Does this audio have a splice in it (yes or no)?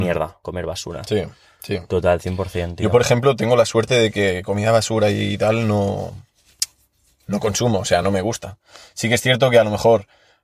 no